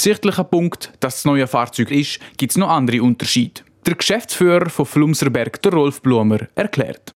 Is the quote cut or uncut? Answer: cut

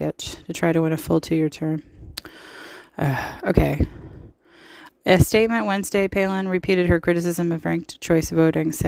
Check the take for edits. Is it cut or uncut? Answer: uncut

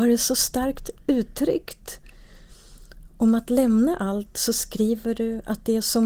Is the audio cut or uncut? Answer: uncut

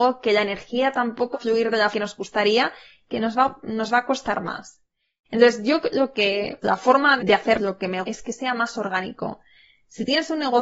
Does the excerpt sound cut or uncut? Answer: cut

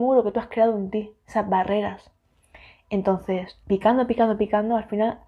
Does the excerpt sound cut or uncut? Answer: cut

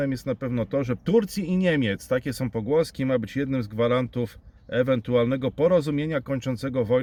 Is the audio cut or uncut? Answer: cut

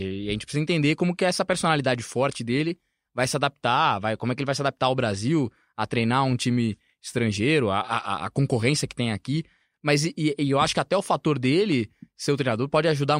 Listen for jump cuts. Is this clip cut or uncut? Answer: uncut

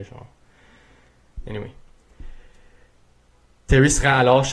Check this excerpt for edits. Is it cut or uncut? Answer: uncut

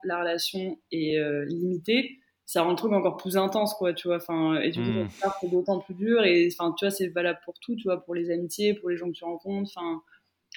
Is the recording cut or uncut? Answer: uncut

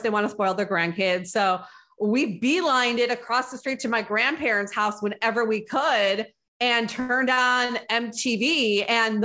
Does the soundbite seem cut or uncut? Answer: uncut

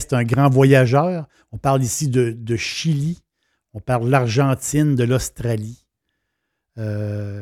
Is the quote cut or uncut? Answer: uncut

